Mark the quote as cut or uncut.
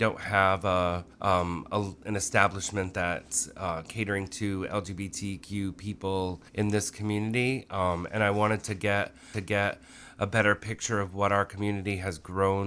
cut